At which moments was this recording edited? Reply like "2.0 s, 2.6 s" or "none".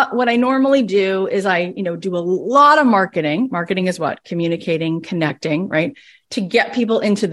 none